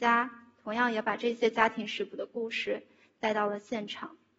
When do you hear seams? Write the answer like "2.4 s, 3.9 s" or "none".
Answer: none